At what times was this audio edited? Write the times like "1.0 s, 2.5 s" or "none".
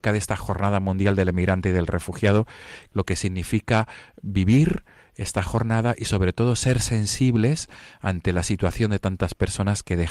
none